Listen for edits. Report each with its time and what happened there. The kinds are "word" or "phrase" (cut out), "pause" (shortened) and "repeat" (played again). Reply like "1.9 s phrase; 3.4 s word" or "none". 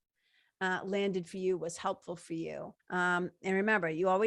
2.8 s pause